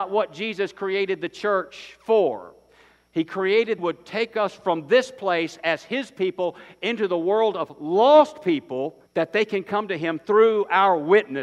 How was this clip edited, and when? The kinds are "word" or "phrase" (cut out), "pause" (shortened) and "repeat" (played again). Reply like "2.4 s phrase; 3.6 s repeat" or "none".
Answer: 3.8 s phrase; 9.1 s pause